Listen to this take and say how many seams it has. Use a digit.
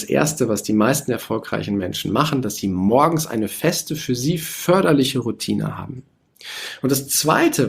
0